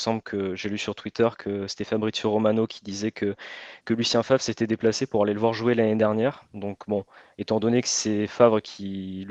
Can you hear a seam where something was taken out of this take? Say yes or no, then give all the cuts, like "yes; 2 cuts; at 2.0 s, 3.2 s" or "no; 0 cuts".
no; 0 cuts